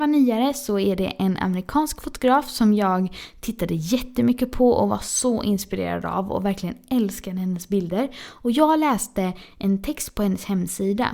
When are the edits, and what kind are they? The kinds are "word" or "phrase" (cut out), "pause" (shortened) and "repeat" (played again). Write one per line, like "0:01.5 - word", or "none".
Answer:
none